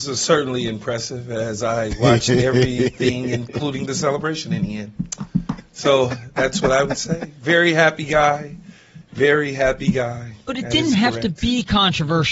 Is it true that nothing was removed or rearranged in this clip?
yes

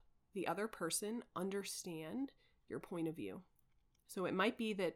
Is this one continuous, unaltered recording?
yes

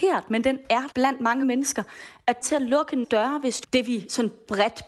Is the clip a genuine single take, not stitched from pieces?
no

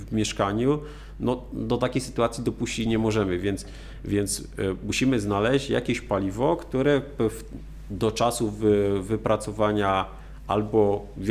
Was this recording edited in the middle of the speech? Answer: no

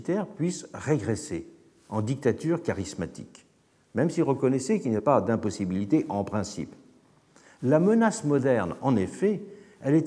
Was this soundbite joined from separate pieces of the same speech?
yes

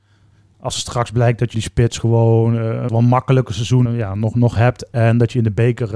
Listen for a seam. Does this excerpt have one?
yes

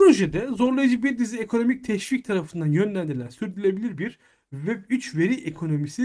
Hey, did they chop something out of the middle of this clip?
no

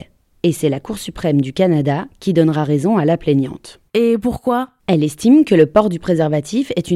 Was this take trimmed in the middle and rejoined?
yes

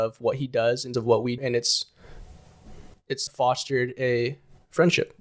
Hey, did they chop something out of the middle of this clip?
yes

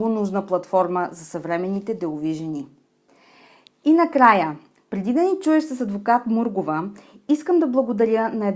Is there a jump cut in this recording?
no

